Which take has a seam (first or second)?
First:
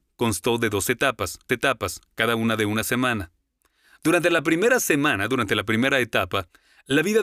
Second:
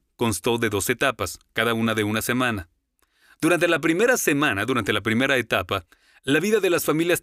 first